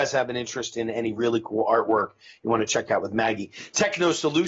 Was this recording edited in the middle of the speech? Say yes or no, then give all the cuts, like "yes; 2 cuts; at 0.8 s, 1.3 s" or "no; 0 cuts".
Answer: no; 0 cuts